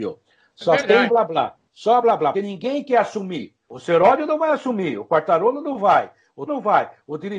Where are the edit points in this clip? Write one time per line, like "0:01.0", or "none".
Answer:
0:01.1
0:02.0
0:02.3
0:03.6
0:06.5